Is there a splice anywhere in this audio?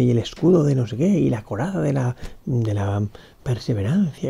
no; 0 cuts

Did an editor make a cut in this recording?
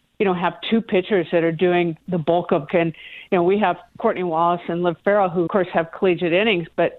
yes; 2 cuts; at 2.7 s, 5.5 s

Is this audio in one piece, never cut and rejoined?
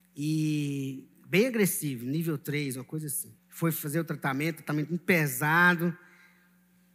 no; 1 cut; at 3.4 s

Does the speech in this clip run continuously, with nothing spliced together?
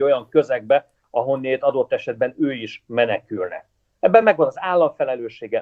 yes; 0 cuts

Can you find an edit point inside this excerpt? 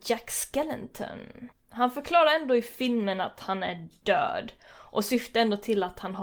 yes; 1 cut; at 1.5 s

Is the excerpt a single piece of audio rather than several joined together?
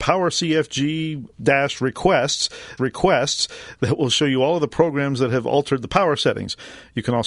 no; 2 cuts; at 1.3 s, 2.8 s

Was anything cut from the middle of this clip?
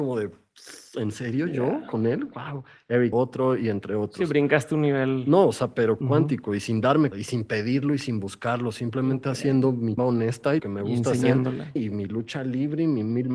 yes; 6 cuts; at 3.1 s, 6.0 s, 7.1 s, 10.0 s, 10.6 s, 11.8 s

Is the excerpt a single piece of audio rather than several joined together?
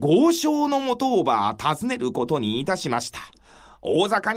yes; 0 cuts

